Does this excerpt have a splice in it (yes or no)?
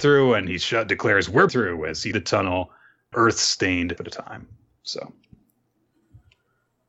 yes